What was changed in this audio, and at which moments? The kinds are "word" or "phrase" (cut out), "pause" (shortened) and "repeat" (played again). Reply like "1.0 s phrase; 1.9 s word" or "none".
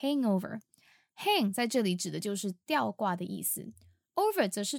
none